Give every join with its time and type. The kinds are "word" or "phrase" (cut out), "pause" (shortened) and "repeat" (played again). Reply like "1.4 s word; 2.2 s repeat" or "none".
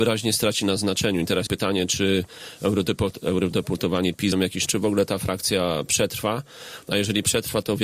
1.5 s word; 4.3 s word; 4.7 s phrase